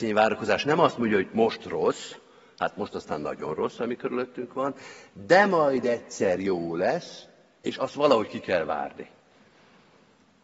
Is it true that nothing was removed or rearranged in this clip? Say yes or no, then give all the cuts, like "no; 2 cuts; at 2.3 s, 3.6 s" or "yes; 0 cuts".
yes; 0 cuts